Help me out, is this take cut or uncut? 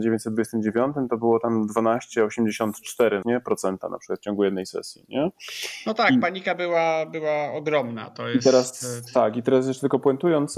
cut